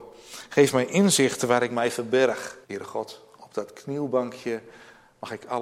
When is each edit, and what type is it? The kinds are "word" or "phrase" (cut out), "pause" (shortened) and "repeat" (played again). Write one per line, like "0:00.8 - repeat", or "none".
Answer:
0:02.6 - pause